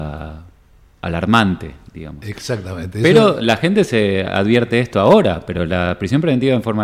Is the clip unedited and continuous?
yes; 0 cuts

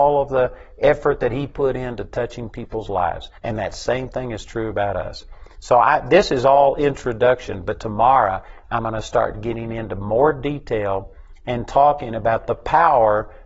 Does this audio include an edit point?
yes; 1 cut; at 3.4 s

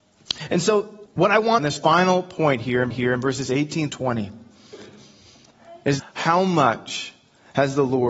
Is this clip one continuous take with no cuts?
no; 5 cuts; at 1.1 s, 1.6 s, 2.9 s, 3.9 s, 6.0 s

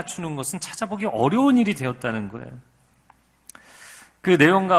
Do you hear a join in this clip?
no; 0 cuts

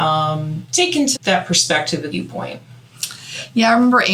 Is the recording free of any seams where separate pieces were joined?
no; 2 cuts; at 1.2 s, 2.1 s

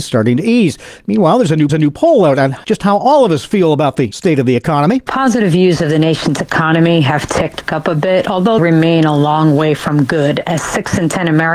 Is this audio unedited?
no; 3 cuts; at 1.7 s, 7.6 s, 8.6 s

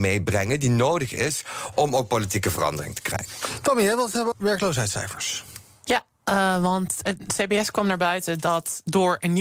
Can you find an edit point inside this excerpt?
yes; 1 cut; at 4.3 s

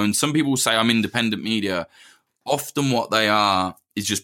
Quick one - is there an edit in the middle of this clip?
no; 0 cuts

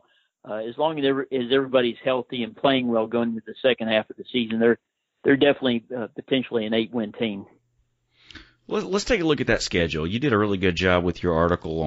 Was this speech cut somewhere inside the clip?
no; 0 cuts

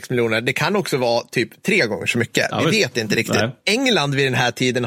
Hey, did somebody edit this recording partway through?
no; 0 cuts

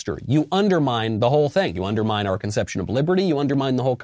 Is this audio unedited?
yes; 0 cuts

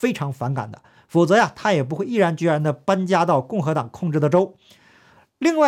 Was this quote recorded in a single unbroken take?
yes; 0 cuts

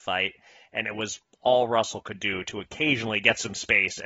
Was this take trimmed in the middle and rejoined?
no; 0 cuts

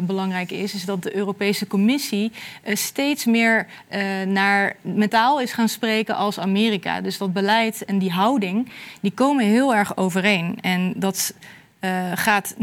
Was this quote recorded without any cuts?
no; 1 cut; at 5.1 s

